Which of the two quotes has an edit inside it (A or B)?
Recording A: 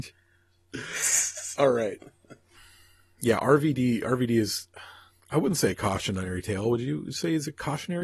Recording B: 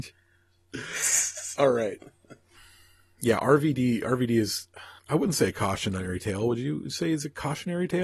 B